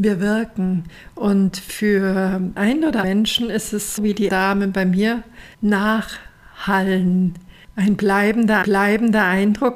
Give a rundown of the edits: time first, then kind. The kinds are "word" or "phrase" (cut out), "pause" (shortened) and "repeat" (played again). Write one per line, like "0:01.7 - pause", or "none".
0:02.6 - word
0:03.0 - word
0:04.0 - word
0:04.3 - word
0:05.5 - pause
0:08.6 - repeat